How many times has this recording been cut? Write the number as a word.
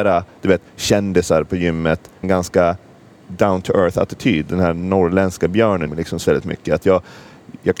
three